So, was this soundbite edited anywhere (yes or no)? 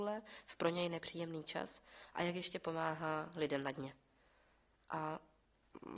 no